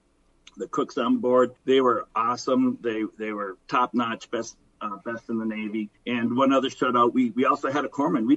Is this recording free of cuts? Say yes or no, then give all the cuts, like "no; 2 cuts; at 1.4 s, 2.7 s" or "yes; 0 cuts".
no; 3 cuts; at 1.6 s, 3.6 s, 6.0 s